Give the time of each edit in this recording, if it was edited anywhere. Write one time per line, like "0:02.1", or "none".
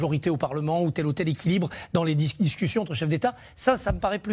none